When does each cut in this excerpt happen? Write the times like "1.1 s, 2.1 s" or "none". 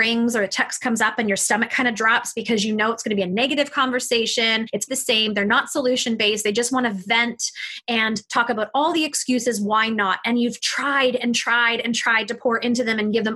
4.9 s